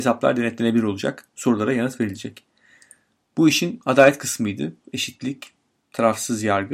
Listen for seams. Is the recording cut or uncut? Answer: uncut